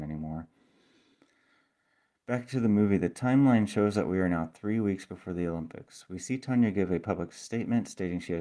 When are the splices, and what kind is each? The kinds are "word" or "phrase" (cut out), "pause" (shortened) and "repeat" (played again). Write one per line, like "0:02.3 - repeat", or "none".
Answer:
none